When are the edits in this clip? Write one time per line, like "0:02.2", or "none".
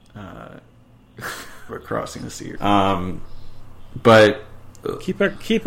0:01.7
0:02.6